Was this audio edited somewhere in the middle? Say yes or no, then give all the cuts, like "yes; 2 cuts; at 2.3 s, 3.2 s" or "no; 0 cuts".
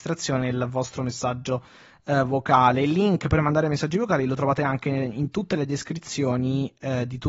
no; 0 cuts